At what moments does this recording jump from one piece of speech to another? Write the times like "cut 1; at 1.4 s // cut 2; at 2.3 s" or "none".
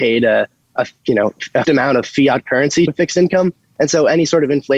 cut 1; at 1.6 s // cut 2; at 2.9 s